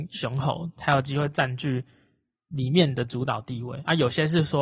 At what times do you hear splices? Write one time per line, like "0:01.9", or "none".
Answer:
none